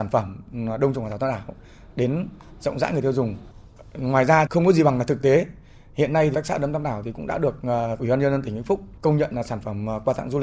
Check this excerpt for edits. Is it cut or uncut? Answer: cut